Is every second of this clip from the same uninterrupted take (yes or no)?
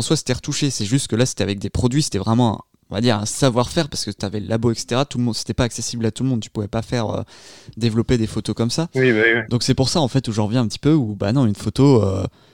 yes